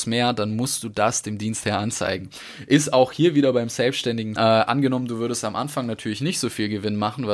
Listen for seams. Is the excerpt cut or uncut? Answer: cut